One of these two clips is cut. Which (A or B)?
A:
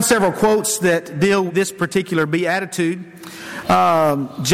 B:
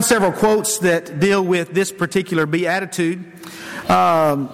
A